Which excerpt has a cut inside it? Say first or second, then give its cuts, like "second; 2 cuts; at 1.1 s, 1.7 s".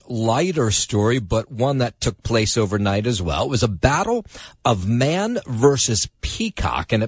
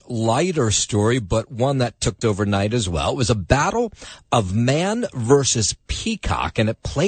second; 1 cut; at 2.2 s